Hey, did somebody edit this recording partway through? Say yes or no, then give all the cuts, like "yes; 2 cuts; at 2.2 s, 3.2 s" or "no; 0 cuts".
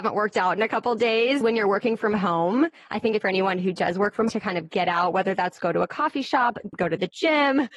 yes; 4 cuts; at 1.4 s, 3.2 s, 4.3 s, 6.7 s